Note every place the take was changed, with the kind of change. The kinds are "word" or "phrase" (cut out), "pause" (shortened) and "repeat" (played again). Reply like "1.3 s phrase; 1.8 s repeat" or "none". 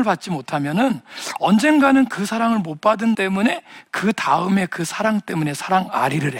3.1 s word